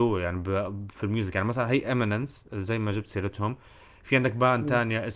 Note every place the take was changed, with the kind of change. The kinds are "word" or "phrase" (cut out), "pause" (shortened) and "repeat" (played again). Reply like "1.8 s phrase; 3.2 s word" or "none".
none